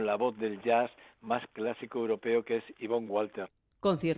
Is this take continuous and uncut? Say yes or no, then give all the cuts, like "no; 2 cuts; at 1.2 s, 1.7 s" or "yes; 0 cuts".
yes; 0 cuts